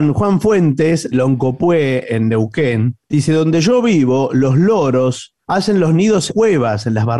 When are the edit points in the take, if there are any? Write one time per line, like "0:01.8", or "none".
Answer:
0:01.1
0:03.0
0:05.4
0:06.3